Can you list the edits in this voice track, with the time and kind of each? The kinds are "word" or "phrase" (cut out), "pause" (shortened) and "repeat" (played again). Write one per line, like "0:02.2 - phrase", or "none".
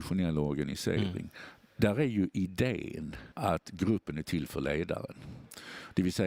0:03.3 - pause